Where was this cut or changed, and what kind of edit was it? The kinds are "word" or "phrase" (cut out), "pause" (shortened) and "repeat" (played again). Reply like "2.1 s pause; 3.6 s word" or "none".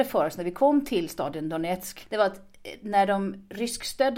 none